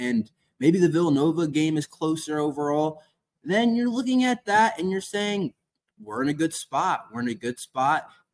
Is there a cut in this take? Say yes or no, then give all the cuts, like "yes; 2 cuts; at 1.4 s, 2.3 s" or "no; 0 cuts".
no; 0 cuts